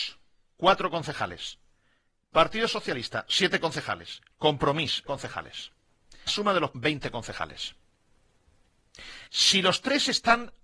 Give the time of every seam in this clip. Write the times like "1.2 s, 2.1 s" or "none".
5.1 s, 6.3 s, 6.7 s, 9.3 s